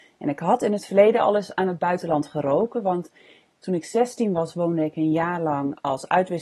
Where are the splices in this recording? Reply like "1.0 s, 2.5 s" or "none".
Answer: none